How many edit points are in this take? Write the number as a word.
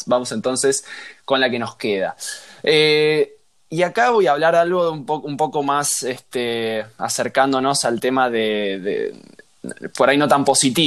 zero